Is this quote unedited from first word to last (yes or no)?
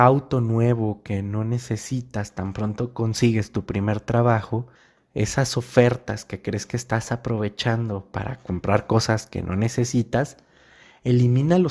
no